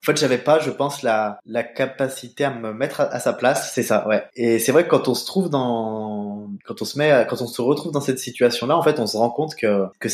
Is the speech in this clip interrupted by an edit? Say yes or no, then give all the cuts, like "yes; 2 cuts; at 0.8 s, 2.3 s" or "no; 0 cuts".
no; 0 cuts